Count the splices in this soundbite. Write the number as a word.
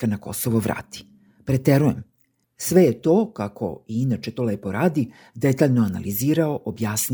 zero